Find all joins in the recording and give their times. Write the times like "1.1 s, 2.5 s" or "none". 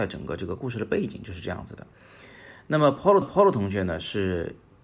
3.2 s